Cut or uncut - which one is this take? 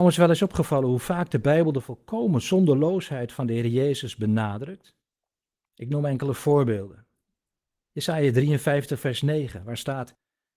uncut